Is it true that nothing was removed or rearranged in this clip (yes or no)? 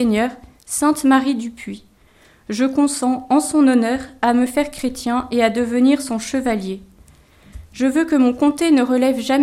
yes